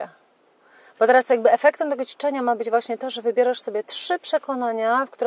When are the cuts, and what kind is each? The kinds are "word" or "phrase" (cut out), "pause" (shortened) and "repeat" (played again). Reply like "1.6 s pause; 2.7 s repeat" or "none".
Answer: none